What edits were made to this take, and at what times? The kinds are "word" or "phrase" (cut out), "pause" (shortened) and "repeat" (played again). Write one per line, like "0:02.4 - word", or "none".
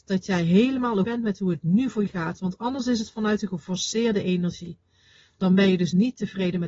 0:01.0 - word
0:02.1 - word